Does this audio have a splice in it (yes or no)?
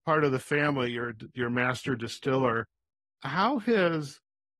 no